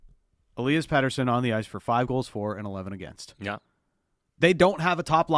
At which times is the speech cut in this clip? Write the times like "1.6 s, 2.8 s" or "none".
none